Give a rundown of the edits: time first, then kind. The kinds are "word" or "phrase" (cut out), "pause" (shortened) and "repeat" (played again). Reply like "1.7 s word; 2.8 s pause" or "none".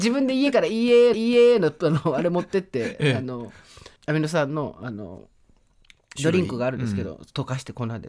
1.1 s repeat; 4.0 s pause